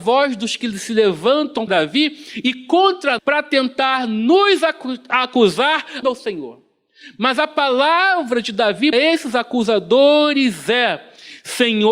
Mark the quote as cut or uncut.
cut